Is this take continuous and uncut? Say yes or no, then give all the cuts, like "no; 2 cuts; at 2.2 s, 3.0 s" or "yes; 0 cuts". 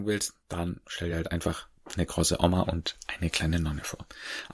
yes; 0 cuts